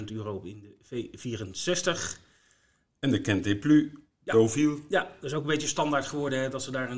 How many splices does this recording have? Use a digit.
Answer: 0